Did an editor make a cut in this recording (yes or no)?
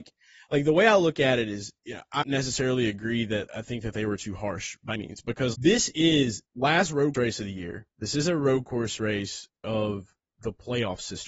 yes